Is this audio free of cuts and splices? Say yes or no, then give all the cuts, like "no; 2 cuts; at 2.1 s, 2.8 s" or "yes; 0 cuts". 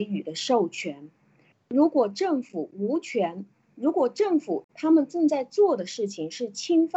yes; 0 cuts